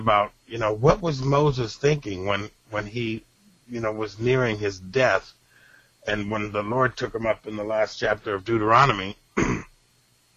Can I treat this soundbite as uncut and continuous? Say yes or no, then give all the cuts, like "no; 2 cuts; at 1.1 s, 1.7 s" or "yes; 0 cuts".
yes; 0 cuts